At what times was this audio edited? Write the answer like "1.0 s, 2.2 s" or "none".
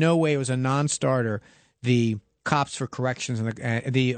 none